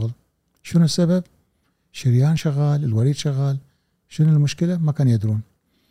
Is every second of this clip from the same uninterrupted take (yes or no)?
yes